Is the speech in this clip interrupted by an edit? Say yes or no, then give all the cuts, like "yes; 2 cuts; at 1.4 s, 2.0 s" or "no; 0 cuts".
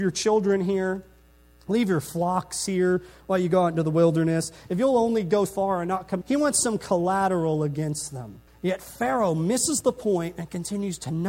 yes; 3 cuts; at 5.5 s, 6.2 s, 8.5 s